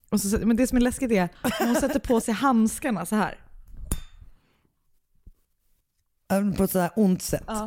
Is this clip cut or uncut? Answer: cut